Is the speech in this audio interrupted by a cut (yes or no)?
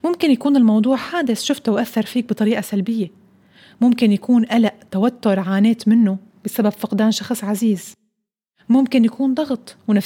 no